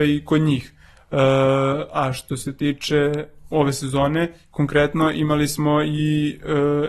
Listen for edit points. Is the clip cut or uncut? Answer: uncut